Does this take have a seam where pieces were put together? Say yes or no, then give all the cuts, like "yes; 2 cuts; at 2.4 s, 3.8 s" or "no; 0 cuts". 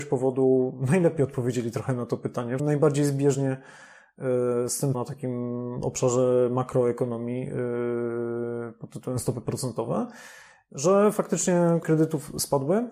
yes; 3 cuts; at 2.6 s, 4.9 s, 11.8 s